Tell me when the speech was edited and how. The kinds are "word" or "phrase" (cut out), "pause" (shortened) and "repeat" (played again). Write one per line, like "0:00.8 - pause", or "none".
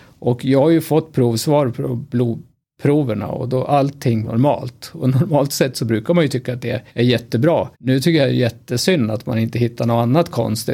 0:04.2 - word
0:06.9 - pause
0:07.7 - pause